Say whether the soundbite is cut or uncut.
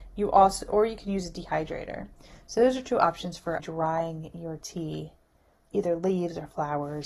cut